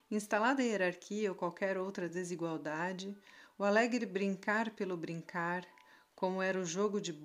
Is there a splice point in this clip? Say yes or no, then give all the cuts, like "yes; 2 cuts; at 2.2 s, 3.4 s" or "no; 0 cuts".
no; 0 cuts